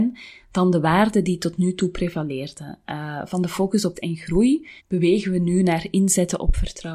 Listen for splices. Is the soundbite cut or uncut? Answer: cut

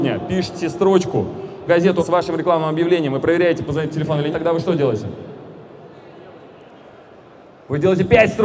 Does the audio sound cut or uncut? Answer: cut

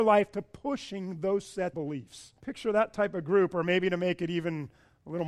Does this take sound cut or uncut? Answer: cut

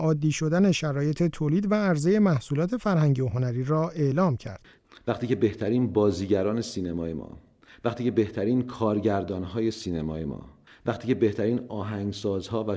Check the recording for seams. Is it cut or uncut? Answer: uncut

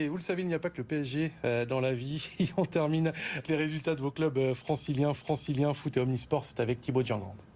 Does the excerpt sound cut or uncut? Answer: cut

